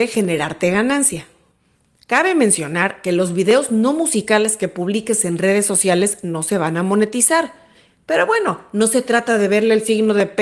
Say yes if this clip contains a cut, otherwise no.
no